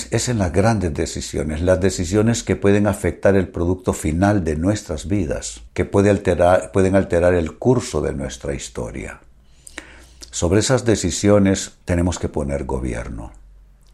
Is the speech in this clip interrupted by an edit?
yes; 2 cuts; at 5.7 s, 11.8 s

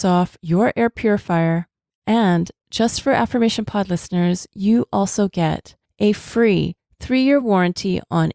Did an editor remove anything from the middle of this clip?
no; 0 cuts

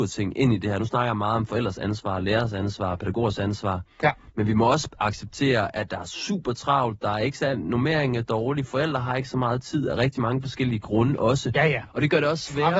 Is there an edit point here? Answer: no; 0 cuts

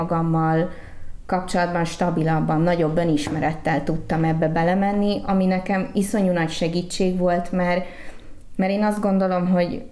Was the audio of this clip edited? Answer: no; 0 cuts

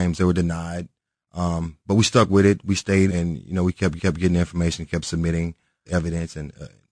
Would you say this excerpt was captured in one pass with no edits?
no; 3 cuts; at 3.1 s, 4.0 s, 5.9 s

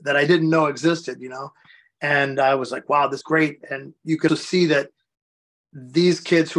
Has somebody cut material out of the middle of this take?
yes; 2 cuts; at 3.2 s, 4.3 s

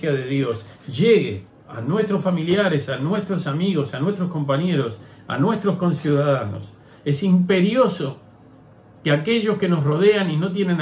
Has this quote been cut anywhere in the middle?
no; 0 cuts

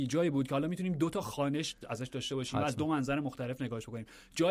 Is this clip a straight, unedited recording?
yes; 0 cuts

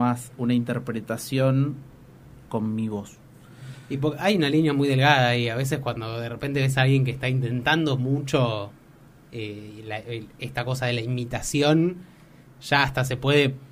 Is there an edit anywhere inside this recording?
no; 0 cuts

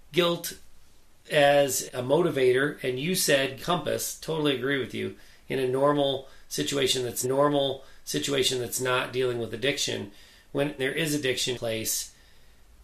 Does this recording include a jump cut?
yes; 5 cuts; at 1.9 s, 3.6 s, 7.2 s, 10.8 s, 11.5 s

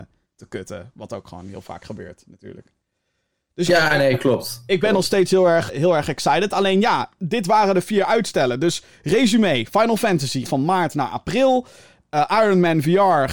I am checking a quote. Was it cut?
yes; 3 cuts; at 3.7 s, 5.7 s, 10.4 s

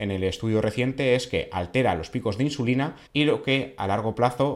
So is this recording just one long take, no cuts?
no; 1 cut; at 3.1 s

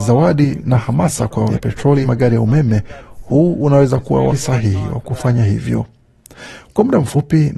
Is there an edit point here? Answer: yes; 3 cuts; at 1.5 s, 2.0 s, 4.3 s

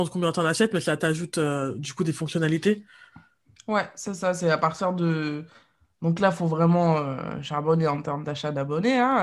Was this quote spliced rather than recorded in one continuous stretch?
no; 0 cuts

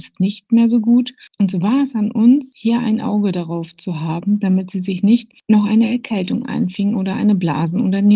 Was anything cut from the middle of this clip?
no; 0 cuts

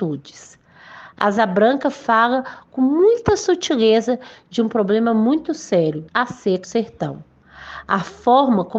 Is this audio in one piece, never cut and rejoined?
no; 2 cuts; at 6.1 s, 6.6 s

